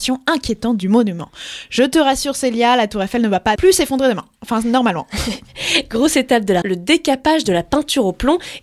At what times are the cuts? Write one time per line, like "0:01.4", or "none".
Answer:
0:03.6
0:06.6